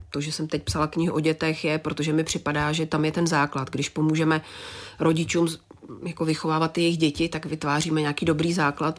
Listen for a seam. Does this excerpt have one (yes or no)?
no